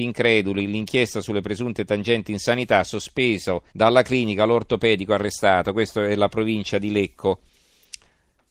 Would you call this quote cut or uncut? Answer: cut